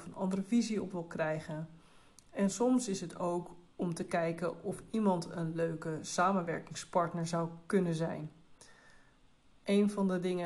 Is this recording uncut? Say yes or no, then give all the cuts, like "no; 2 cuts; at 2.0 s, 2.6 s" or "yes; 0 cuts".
yes; 0 cuts